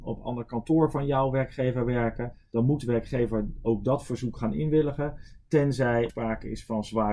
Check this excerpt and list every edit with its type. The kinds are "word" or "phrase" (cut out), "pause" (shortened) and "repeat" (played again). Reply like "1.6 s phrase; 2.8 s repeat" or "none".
6.1 s word